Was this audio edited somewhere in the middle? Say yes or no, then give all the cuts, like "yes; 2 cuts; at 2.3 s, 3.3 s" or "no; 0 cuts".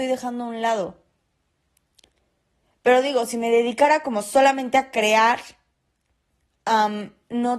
no; 0 cuts